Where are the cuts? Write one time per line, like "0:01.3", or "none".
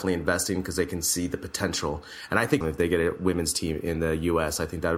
0:02.6

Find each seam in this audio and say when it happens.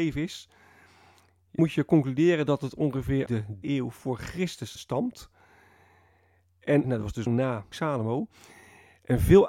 0:01.6
0:03.3
0:03.6
0:04.8
0:06.8
0:07.3
0:07.7

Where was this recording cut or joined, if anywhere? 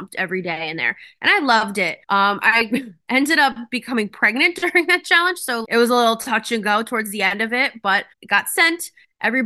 0:02.0
0:05.6
0:08.1

